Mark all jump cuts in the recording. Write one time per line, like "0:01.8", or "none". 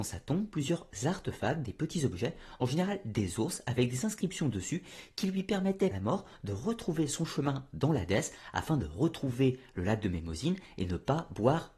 0:05.9